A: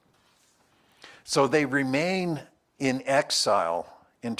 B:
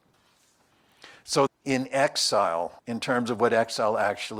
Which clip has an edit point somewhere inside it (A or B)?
B